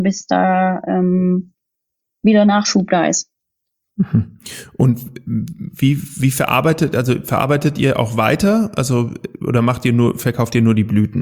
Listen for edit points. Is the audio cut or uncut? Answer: uncut